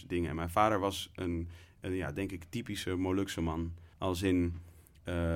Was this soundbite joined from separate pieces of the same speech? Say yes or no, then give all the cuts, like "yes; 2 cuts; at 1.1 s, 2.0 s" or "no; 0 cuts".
yes; 1 cut; at 3.9 s